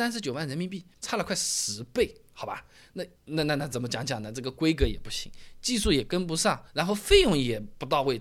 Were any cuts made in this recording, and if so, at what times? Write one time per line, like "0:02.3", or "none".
0:00.9
0:03.2
0:06.7

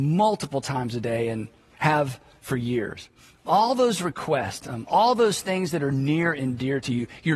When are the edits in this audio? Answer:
none

